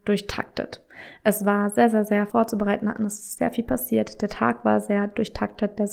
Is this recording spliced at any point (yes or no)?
yes